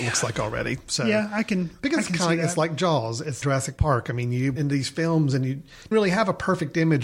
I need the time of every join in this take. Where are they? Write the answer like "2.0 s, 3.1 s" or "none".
3.4 s, 4.6 s, 5.9 s